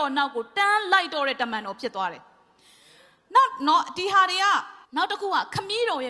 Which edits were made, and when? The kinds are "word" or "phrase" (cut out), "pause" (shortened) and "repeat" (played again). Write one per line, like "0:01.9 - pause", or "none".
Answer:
0:04.8 - pause